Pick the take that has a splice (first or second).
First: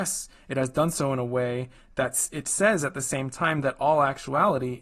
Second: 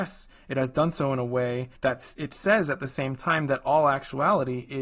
second